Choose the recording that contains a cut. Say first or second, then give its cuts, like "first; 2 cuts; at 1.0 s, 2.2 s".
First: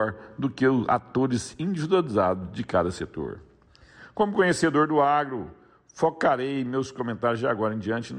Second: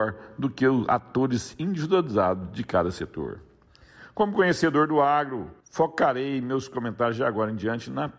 second; 1 cut; at 5.6 s